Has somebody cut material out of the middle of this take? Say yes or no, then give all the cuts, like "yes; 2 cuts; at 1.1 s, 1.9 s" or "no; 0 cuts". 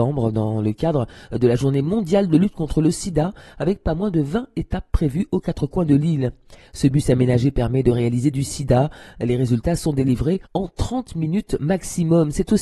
yes; 2 cuts; at 8.3 s, 10.4 s